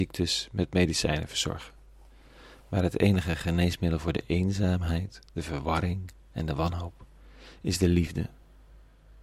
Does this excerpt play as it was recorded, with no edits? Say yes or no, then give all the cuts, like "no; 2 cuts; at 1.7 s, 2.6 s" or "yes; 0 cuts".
yes; 0 cuts